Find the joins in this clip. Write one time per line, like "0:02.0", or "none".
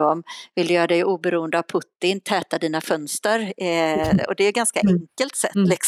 none